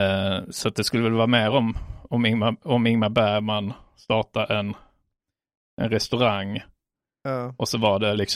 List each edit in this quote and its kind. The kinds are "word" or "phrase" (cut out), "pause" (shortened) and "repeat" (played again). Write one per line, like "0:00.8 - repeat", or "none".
none